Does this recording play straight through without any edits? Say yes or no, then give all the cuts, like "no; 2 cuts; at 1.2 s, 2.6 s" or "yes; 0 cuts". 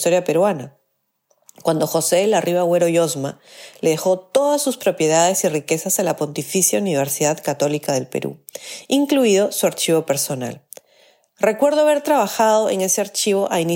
yes; 0 cuts